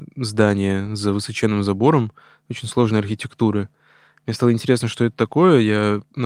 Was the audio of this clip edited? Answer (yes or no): no